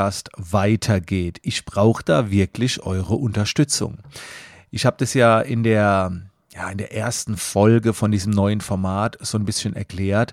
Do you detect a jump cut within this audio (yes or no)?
no